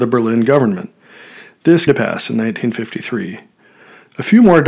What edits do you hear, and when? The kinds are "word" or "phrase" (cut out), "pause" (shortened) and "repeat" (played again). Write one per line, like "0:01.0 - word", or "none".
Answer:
0:01.9 - word